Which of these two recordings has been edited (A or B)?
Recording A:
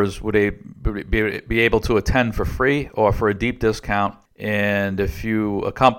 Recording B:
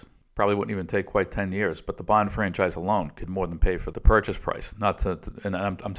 B